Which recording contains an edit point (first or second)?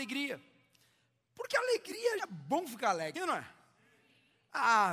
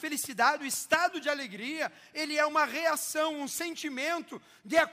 first